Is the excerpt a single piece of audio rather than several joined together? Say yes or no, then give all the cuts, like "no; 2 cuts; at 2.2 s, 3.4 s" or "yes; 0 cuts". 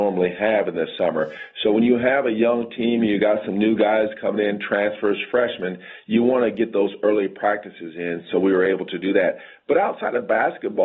yes; 0 cuts